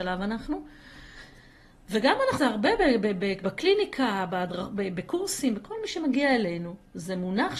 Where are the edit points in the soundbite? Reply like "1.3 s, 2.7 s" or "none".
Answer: 2.4 s